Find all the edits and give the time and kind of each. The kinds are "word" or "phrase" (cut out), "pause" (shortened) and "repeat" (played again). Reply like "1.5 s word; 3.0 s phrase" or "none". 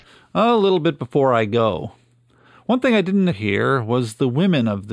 3.3 s word